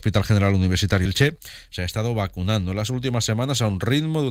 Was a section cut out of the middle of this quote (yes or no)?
yes